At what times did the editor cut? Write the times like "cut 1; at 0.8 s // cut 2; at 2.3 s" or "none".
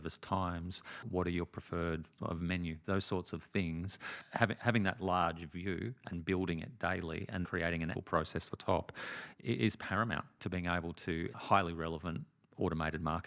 cut 1; at 2.2 s // cut 2; at 7.4 s // cut 3; at 7.9 s // cut 4; at 8.5 s // cut 5; at 10.4 s // cut 6; at 11.3 s